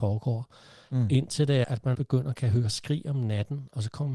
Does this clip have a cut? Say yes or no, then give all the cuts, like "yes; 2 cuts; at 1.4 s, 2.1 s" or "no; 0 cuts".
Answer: yes; 2 cuts; at 1.6 s, 1.9 s